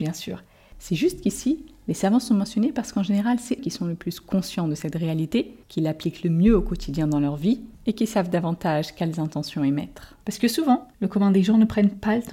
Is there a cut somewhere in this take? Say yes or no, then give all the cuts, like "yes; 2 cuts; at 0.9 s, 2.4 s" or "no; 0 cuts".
yes; 5 cuts; at 3.6 s, 5.6 s, 7.7 s, 10.2 s, 10.9 s